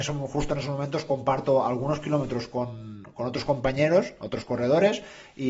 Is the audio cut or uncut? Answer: uncut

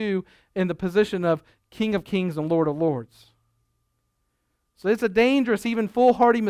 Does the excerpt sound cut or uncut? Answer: uncut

